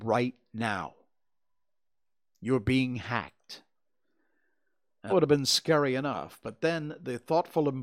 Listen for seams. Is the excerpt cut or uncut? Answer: cut